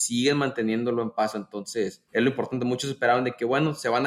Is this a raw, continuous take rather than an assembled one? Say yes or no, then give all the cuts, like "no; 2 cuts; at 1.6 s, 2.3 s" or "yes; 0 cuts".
no; 1 cut; at 2.1 s